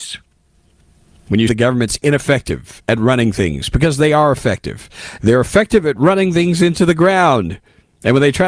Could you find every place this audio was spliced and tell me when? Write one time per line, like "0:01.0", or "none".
0:01.5